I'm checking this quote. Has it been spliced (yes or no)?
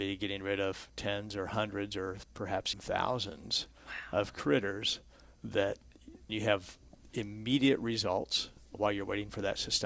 yes